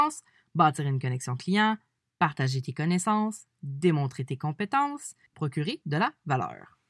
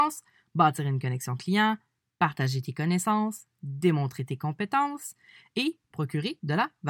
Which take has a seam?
first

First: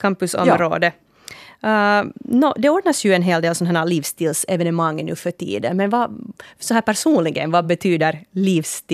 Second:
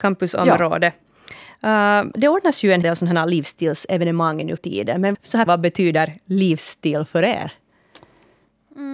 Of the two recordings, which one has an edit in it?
second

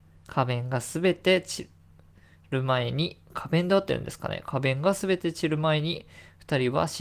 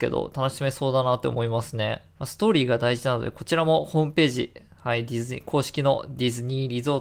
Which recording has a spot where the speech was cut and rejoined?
second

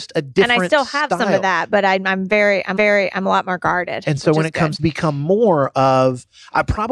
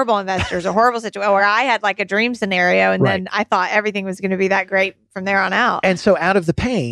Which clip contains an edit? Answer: first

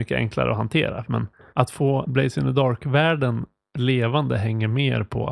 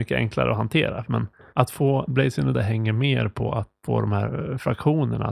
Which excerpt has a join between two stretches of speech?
second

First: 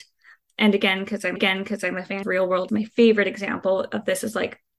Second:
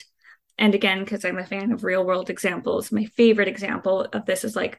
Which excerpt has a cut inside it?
first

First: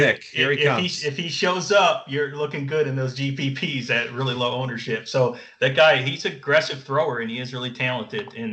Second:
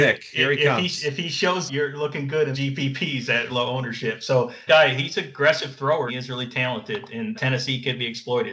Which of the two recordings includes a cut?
second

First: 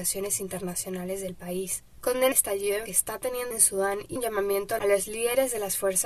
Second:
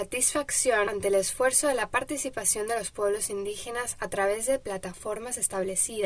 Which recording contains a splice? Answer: first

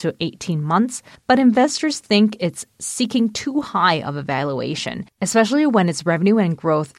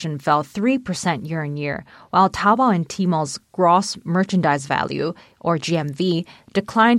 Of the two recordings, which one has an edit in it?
first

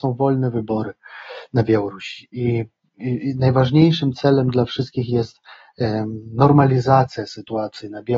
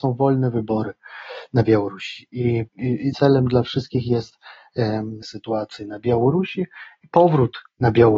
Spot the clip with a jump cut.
second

